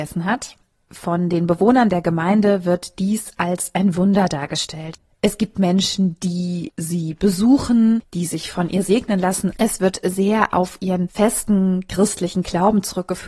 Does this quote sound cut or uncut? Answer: uncut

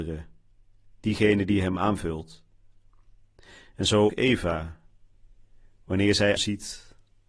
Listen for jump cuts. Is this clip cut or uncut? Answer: cut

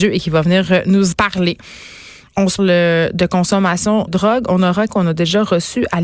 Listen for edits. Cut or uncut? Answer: cut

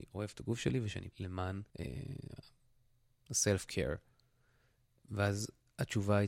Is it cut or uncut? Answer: cut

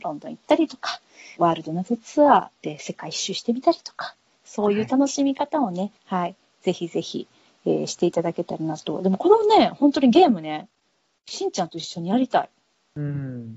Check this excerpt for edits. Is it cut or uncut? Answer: cut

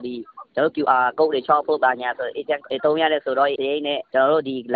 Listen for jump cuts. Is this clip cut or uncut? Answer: cut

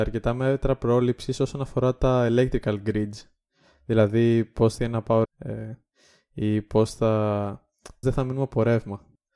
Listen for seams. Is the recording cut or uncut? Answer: cut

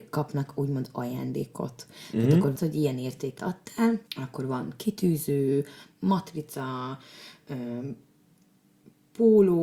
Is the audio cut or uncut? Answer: cut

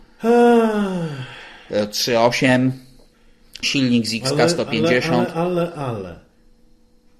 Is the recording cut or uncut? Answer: cut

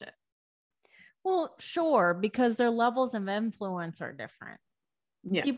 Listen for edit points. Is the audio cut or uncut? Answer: uncut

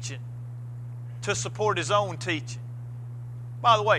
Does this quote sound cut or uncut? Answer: uncut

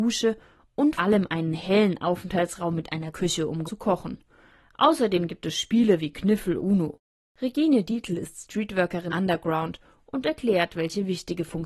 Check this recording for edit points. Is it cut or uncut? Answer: cut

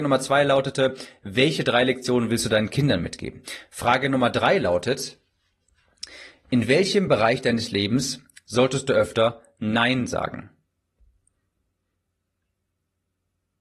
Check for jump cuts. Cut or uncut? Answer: uncut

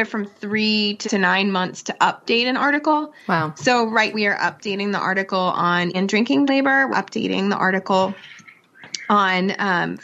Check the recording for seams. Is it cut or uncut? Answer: cut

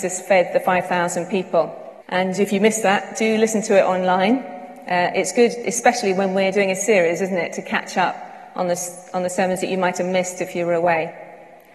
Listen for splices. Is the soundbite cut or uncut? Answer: cut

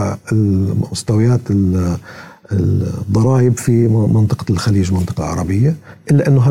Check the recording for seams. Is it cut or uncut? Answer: uncut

